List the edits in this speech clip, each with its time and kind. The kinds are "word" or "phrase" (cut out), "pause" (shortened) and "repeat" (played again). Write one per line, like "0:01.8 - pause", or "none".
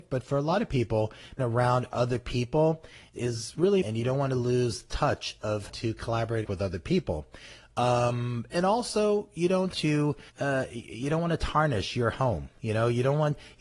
0:01.4 - word
0:03.1 - word
0:03.8 - word
0:05.7 - word
0:06.4 - phrase
0:08.5 - word
0:09.7 - word
0:10.3 - pause